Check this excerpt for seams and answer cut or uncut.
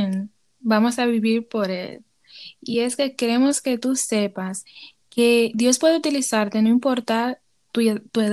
uncut